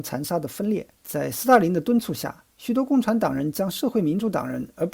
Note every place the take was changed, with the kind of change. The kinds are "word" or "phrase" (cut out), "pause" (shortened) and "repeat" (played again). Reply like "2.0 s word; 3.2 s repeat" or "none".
1.0 s pause; 2.5 s pause

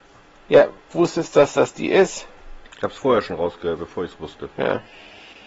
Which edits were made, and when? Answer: 0.9 s phrase; 2.7 s pause

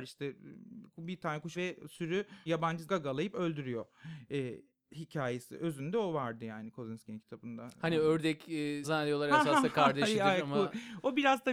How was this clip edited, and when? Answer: 1.5 s word; 2.5 s word; 2.9 s word; 8.8 s word

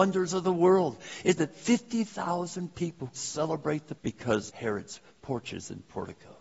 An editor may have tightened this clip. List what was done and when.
1.4 s word; 3.1 s word; 4.0 s word; 4.5 s word

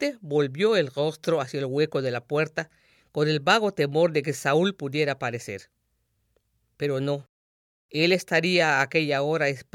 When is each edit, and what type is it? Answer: none

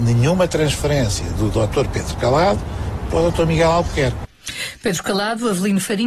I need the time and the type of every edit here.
none

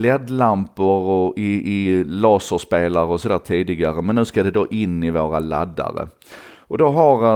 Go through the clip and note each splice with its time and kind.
none

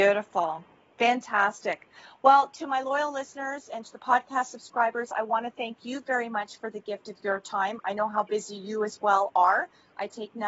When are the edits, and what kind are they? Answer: none

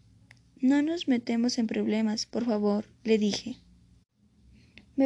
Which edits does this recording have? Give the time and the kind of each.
none

